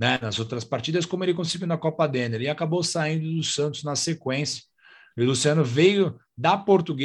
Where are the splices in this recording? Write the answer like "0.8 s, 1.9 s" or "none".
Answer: none